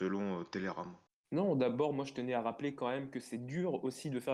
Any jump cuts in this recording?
yes; 1 cut; at 1.1 s

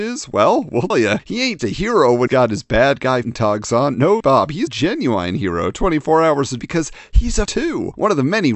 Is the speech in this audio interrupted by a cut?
yes; 8 cuts; at 0.9 s, 1.6 s, 2.3 s, 3.2 s, 4.2 s, 4.7 s, 6.6 s, 7.5 s

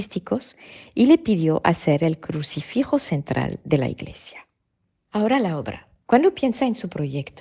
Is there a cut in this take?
no; 0 cuts

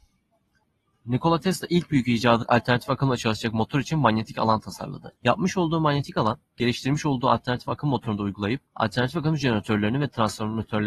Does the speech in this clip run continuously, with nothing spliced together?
no; 3 cuts; at 2.4 s, 5.2 s, 8.7 s

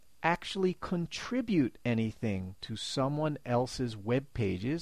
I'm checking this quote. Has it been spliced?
no; 0 cuts

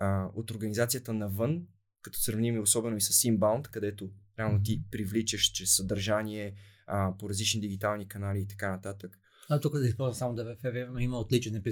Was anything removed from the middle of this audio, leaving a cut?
no; 0 cuts

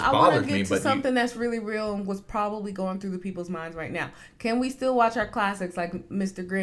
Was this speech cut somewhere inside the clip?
no; 0 cuts

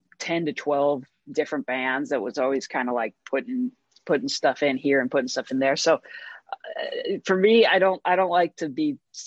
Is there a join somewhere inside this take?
no; 0 cuts

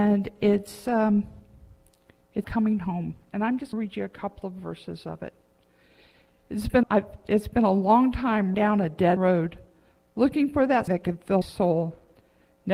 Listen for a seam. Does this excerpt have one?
yes; 7 cuts; at 2.4 s, 3.7 s, 6.8 s, 8.5 s, 9.2 s, 10.9 s, 11.4 s

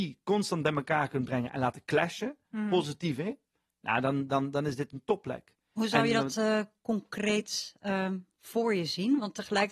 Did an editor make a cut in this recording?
no; 0 cuts

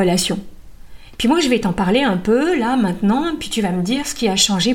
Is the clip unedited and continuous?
yes; 0 cuts

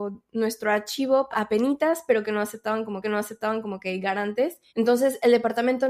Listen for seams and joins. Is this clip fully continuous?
no; 3 cuts; at 1.3 s, 3.0 s, 4.7 s

